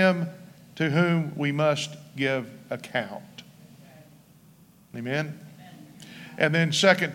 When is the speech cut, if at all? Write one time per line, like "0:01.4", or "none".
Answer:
none